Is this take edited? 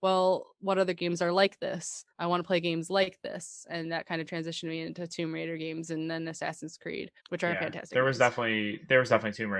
yes; 2 cuts; at 2.1 s, 7.2 s

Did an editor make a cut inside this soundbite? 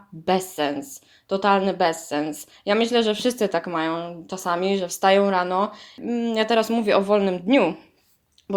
no; 0 cuts

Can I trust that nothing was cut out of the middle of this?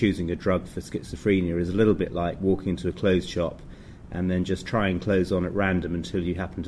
yes; 0 cuts

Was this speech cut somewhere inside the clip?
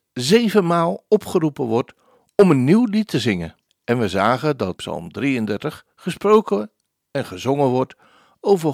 yes; 2 cuts; at 3.7 s, 4.8 s

